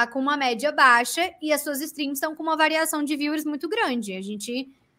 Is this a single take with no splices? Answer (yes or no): yes